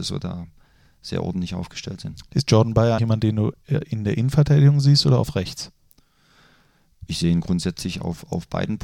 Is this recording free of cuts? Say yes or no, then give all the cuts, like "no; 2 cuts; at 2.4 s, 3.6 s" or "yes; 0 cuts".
no; 1 cut; at 3.0 s